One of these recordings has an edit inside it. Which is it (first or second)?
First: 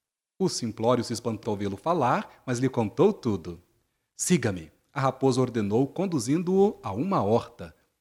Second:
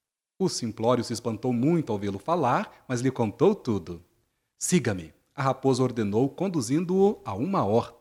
first